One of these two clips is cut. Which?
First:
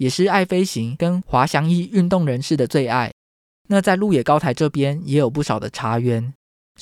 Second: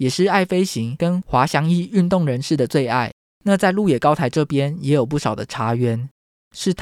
second; 1 cut; at 3.3 s

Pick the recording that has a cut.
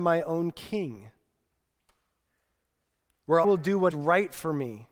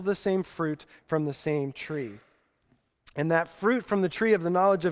first; 2 cuts; at 3.4 s, 3.9 s

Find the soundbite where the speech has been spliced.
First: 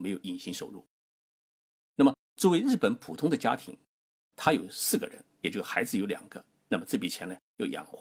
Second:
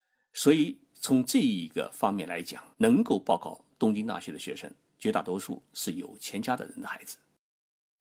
second; 2 cuts; at 2.7 s, 4.9 s

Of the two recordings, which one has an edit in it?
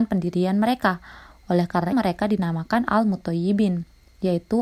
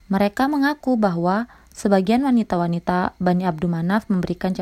first; 1 cut; at 1.9 s

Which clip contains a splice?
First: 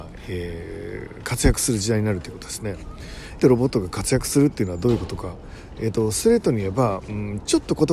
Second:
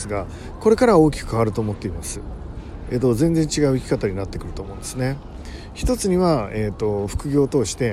first; 1 cut; at 3.4 s

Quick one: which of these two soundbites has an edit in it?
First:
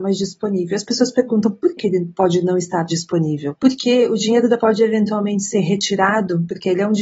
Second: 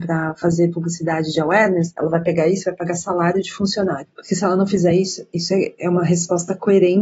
first; 3 cuts; at 1.8 s, 2.9 s, 4.6 s

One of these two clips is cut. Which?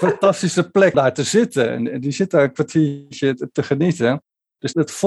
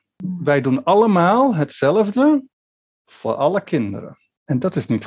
first; 1 cut; at 0.9 s

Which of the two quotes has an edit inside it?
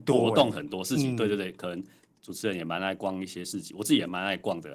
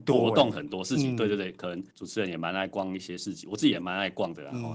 second; 1 cut; at 1.9 s

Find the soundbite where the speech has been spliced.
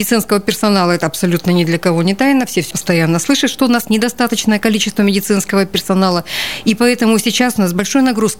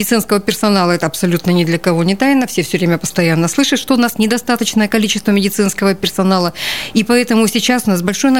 first; 1 cut; at 2.7 s

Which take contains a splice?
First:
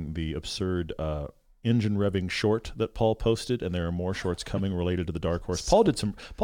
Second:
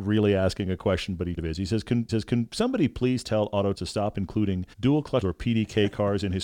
second; 5 cuts; at 1.4 s, 2.1 s, 3.7 s, 4.7 s, 5.2 s

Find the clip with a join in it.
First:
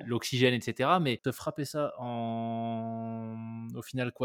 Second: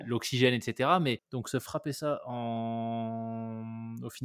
first; 1 cut; at 1.2 s

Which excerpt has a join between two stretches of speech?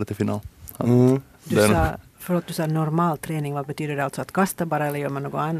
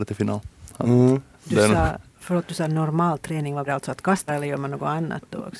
second; 2 cuts; at 3.7 s, 4.3 s

